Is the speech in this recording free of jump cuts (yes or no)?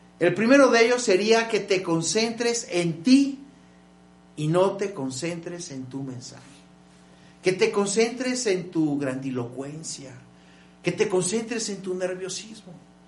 yes